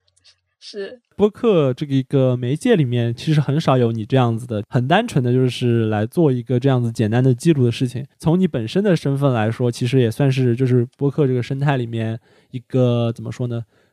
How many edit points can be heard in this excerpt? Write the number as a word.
one